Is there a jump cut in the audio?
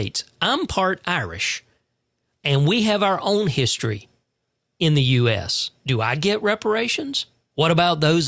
no; 0 cuts

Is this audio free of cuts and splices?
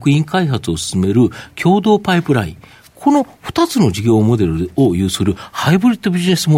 yes; 0 cuts

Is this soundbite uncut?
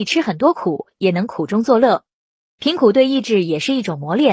yes; 0 cuts

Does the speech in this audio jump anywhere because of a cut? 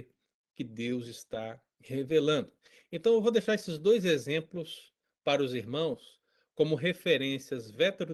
no; 0 cuts

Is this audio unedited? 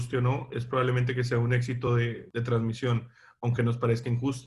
yes; 0 cuts

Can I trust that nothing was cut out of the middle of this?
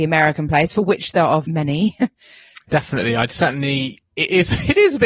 no; 2 cuts; at 1.4 s, 2.7 s

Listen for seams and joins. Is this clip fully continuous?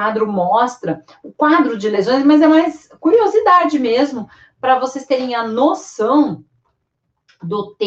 yes; 0 cuts

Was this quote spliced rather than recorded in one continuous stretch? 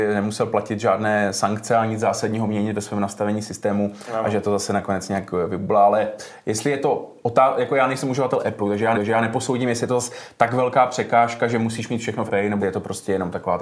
yes; 3 cuts; at 8.9 s, 12.3 s, 12.6 s

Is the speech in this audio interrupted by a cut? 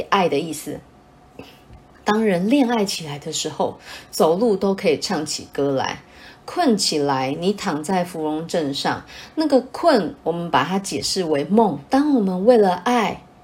yes; 2 cuts; at 1.9 s, 11.9 s

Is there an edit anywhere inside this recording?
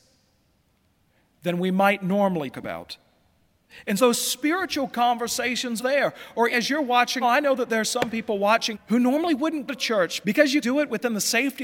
yes; 9 cuts; at 2.5 s, 4.0 s, 5.8 s, 6.5 s, 7.2 s, 8.7 s, 9.7 s, 10.2 s, 10.6 s

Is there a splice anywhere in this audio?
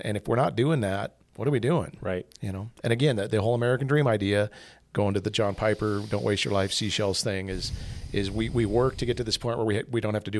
yes; 1 cut; at 1.2 s

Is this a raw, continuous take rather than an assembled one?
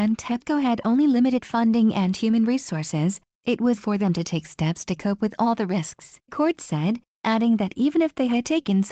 no; 2 cuts; at 3.8 s, 6.3 s

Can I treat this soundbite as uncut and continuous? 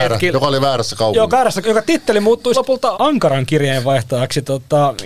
no; 4 cuts; at 1.3 s, 1.6 s, 2.5 s, 2.9 s

